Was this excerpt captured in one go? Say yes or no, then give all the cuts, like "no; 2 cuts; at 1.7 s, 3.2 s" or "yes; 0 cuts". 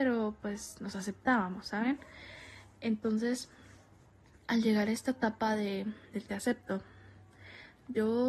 yes; 0 cuts